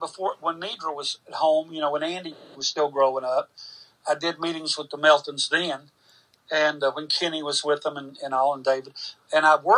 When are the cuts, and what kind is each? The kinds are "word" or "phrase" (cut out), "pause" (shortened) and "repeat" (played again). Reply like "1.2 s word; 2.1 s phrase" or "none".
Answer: none